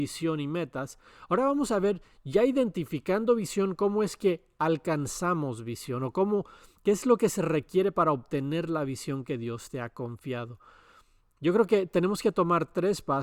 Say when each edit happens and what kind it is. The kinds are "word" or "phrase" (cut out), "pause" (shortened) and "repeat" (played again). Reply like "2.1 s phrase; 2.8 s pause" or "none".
none

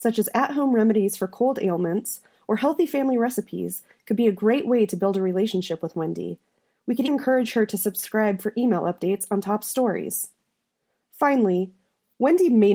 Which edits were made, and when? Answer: 7.1 s word

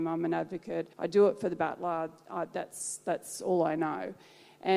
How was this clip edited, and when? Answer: 0.9 s pause

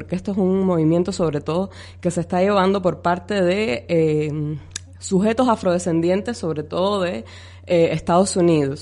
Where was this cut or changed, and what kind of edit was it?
none

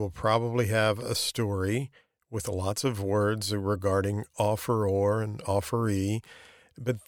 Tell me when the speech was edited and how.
none

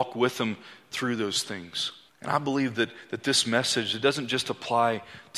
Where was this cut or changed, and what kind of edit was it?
2.1 s pause

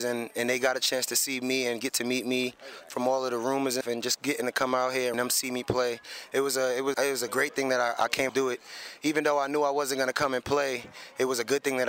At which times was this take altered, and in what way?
3.8 s word; 5.1 s phrase; 6.9 s word; 8.3 s phrase

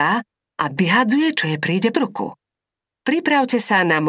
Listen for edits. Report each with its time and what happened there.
1.9 s word

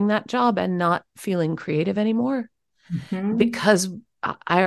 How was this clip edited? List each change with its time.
none

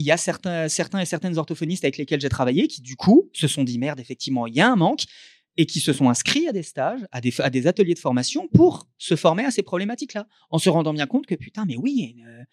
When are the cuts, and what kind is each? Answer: none

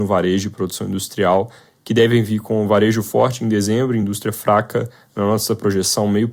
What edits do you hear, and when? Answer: none

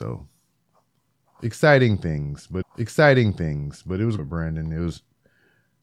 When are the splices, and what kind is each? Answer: 2.6 s repeat; 4.2 s phrase

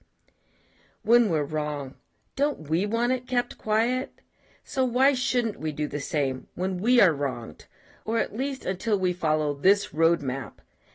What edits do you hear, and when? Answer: none

